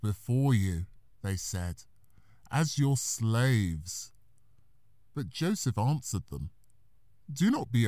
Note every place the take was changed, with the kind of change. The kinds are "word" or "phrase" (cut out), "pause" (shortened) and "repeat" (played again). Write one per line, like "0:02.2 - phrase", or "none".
none